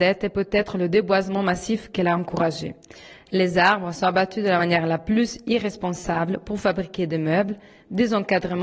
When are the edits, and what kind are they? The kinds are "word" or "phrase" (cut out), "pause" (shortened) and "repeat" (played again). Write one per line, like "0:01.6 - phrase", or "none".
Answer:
none